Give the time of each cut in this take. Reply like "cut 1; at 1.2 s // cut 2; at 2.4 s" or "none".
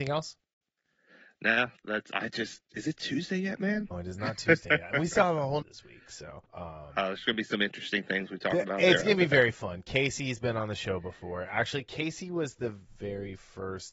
cut 1; at 3.9 s // cut 2; at 5.6 s // cut 3; at 6.5 s